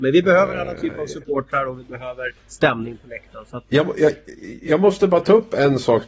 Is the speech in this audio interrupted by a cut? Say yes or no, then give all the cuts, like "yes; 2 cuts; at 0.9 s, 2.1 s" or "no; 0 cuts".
yes; 1 cut; at 2.4 s